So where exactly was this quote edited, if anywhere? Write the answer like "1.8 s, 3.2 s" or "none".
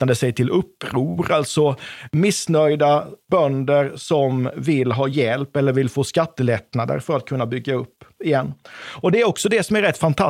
none